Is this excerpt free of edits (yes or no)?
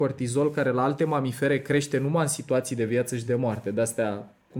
yes